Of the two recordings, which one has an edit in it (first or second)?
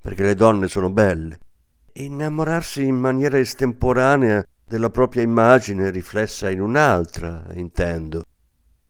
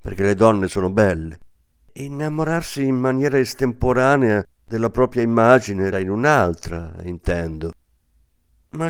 second